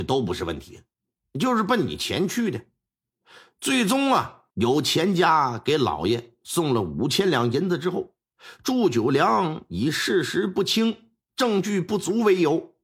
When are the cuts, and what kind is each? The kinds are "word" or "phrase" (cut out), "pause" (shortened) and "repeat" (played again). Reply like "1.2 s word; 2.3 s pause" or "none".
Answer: 4.5 s pause